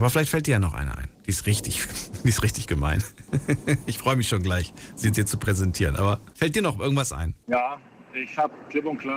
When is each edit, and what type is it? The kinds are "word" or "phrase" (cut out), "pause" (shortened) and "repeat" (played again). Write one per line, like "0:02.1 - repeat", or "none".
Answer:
0:01.1 - pause
0:06.3 - pause
0:07.4 - pause